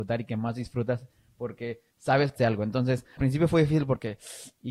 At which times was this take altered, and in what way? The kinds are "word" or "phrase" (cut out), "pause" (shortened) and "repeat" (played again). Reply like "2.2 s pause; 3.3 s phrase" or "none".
1.9 s pause; 2.4 s word; 3.2 s word

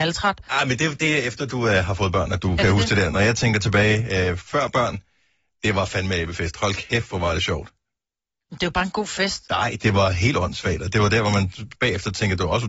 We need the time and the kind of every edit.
none

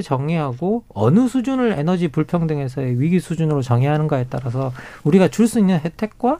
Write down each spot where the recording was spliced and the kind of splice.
none

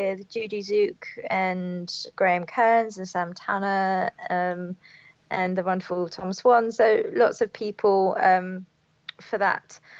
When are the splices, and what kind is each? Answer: 2.1 s word

